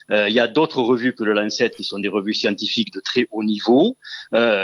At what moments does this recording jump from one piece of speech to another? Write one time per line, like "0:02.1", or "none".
none

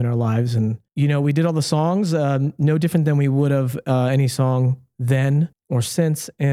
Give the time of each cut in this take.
0:05.5

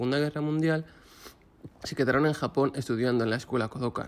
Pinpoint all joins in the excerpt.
0:01.7

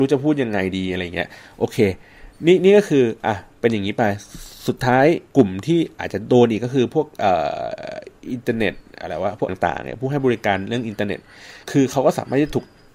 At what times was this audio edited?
0:02.3
0:05.3
0:09.5
0:11.6

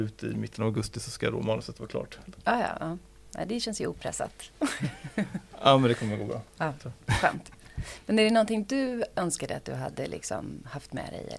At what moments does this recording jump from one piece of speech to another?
none

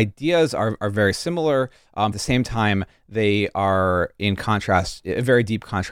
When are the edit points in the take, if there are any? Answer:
0:02.1

